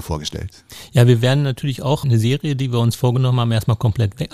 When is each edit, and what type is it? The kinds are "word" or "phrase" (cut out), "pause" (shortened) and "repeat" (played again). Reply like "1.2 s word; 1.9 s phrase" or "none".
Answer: 2.0 s word